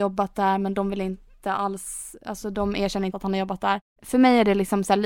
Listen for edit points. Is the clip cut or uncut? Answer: cut